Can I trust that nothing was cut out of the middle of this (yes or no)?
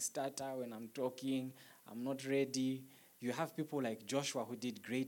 yes